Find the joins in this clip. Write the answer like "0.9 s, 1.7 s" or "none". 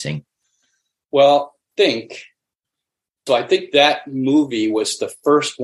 1.6 s, 3.3 s